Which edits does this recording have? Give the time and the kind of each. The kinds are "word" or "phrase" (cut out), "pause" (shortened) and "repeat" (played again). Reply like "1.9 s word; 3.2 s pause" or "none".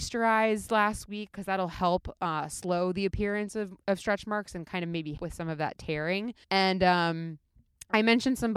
5.2 s word; 6.4 s pause

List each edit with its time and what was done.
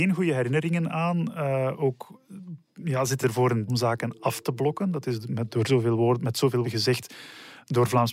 2.6 s pause; 3.2 s word; 3.7 s phrase; 6.6 s word

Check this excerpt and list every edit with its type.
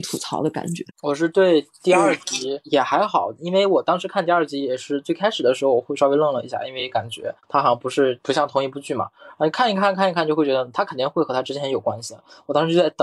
0.9 s pause; 7.4 s pause

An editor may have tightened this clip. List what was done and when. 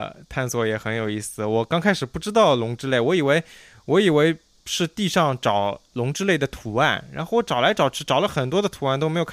none

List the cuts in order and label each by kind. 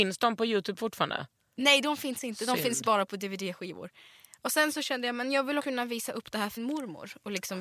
5.6 s word; 6.6 s word

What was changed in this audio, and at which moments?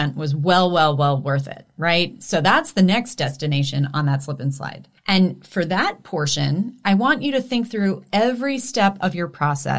5.0 s pause

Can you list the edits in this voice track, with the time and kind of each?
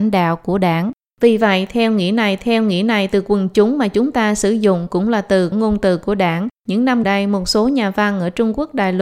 2.4 s repeat; 5.5 s word; 6.6 s pause; 7.0 s word

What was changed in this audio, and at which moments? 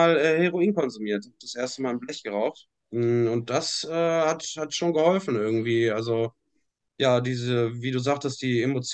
none

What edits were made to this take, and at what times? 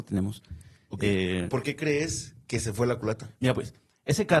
1.5 s word; 2.4 s pause

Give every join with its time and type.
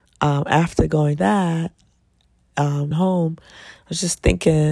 1.2 s word; 2.9 s word

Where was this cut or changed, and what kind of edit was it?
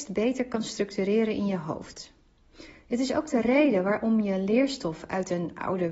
none

